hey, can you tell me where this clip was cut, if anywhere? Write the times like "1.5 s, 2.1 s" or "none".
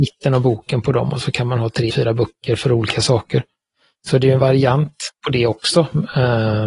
1.9 s